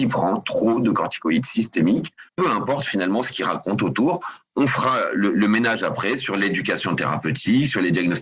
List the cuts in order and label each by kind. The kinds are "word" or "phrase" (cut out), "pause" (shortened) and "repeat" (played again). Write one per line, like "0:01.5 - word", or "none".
0:02.3 - pause